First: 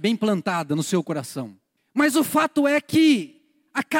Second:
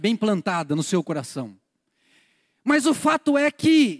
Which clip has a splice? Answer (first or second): first